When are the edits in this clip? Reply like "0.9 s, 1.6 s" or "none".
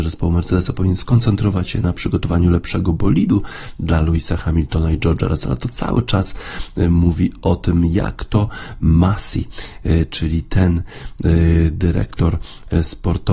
none